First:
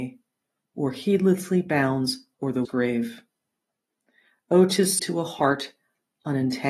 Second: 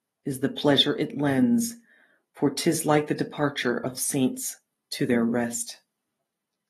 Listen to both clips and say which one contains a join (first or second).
first